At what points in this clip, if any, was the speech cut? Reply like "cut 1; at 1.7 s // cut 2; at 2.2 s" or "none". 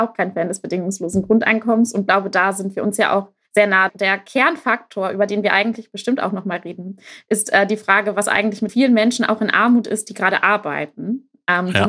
cut 1; at 3.4 s // cut 2; at 8.7 s